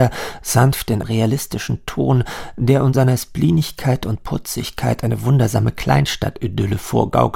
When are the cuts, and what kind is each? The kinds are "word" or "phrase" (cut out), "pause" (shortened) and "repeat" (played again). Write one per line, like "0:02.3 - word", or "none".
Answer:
0:01.0 - word
0:02.9 - word

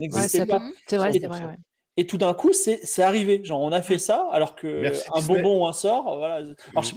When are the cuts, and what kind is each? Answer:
none

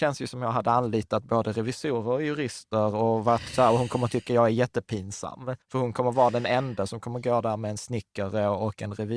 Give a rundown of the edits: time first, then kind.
0:05.6 - pause

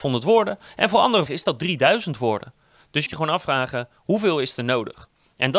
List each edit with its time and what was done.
0:01.3 - word
0:03.1 - phrase

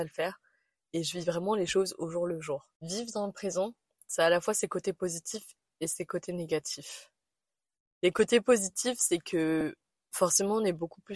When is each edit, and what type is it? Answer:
none

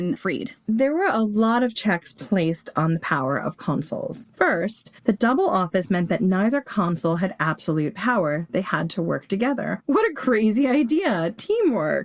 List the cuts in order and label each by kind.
0:05.0 - pause

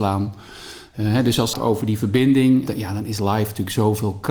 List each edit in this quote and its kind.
0:01.5 - phrase
0:02.7 - word

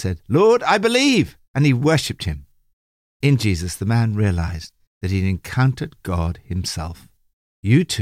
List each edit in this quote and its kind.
none

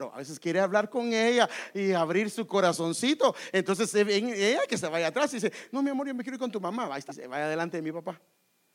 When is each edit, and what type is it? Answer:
0:07.1 - word

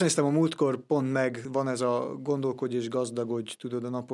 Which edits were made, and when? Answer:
none

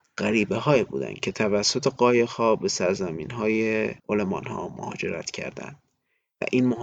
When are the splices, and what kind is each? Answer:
none

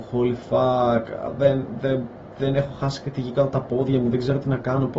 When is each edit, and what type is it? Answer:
0:01.3 - word

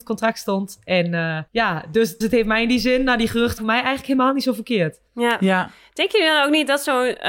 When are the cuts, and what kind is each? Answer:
0:01.5 - pause
0:02.2 - word
0:03.6 - word
0:05.1 - pause

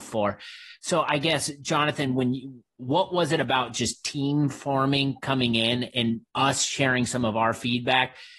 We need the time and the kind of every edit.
0:06.3 - pause

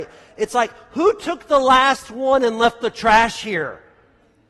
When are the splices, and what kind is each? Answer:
none

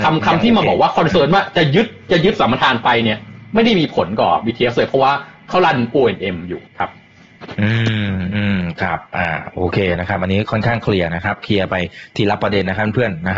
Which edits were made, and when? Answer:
0:06.7 - pause

